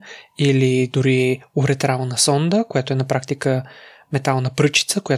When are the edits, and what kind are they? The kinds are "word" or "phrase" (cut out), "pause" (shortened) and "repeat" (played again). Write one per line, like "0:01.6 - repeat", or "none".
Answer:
none